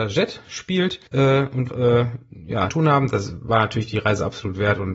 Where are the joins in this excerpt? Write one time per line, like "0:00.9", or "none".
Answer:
0:01.1
0:01.7
0:02.7